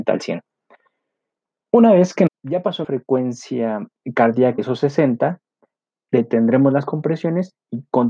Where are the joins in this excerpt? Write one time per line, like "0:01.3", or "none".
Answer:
0:02.3
0:02.8
0:04.6